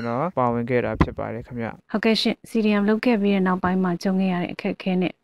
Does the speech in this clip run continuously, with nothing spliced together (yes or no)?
no